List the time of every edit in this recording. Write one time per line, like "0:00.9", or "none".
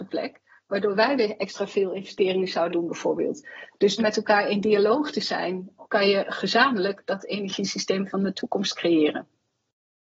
0:02.7
0:04.0
0:05.8